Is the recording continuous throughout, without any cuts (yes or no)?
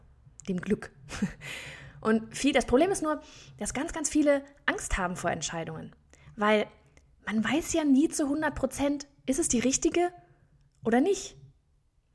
yes